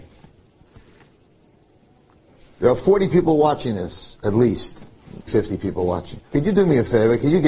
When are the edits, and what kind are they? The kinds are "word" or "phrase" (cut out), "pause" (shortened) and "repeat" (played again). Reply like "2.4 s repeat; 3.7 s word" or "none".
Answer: 5.3 s word; 6.3 s pause

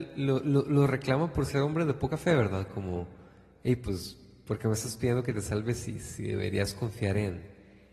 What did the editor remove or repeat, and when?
none

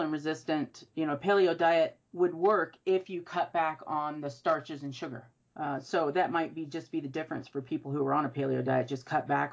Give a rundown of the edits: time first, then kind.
2.1 s pause

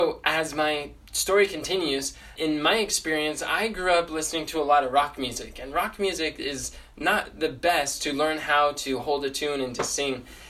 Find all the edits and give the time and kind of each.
2.4 s word

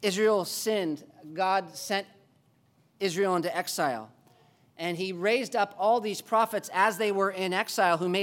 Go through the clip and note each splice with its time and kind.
none

